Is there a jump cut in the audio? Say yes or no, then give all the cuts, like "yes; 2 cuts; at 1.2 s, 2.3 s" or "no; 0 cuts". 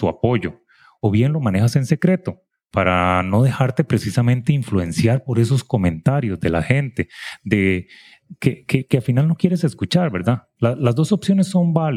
no; 0 cuts